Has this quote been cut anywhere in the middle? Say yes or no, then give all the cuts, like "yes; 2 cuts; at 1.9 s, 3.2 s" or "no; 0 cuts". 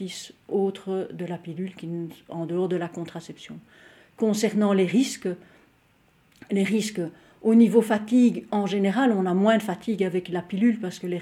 no; 0 cuts